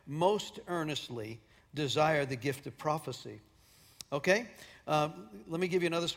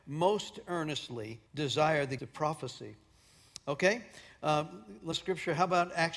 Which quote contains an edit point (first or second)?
second